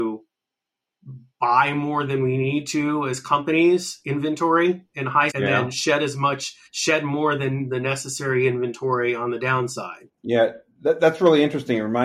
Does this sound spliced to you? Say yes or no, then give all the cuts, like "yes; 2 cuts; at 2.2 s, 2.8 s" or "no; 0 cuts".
yes; 3 cuts; at 5.3 s, 6.7 s, 10.1 s